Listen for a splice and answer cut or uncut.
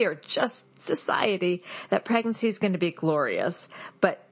uncut